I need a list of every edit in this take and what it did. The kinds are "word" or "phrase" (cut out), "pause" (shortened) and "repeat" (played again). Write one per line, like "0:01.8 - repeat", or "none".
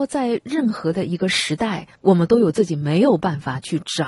0:01.9 - pause